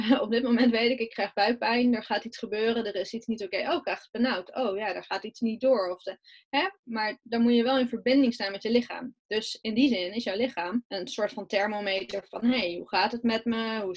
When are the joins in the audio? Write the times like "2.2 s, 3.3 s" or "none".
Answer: none